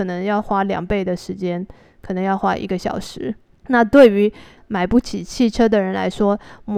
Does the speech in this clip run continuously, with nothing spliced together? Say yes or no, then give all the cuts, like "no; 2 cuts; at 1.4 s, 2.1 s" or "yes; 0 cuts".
yes; 0 cuts